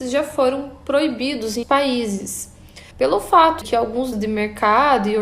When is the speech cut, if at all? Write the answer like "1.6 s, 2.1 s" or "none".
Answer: 1.6 s, 2.9 s, 3.6 s, 4.1 s